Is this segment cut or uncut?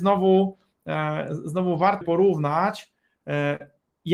cut